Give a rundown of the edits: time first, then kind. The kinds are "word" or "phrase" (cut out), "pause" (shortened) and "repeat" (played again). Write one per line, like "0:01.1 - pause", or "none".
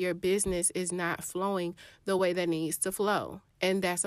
none

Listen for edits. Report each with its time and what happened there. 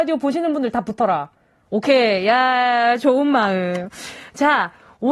none

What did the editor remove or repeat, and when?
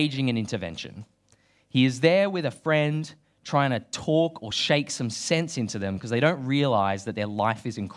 none

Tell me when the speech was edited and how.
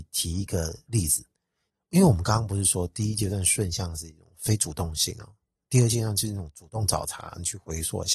none

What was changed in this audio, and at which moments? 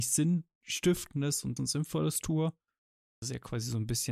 0:01.6 - word
0:03.2 - word

